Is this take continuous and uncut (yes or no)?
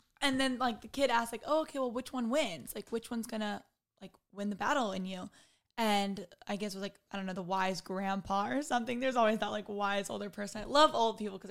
yes